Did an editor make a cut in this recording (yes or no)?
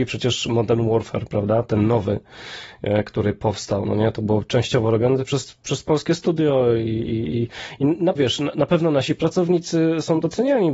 yes